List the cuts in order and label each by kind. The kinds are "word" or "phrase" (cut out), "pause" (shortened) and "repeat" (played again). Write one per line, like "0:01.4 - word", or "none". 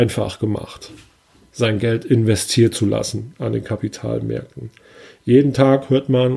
none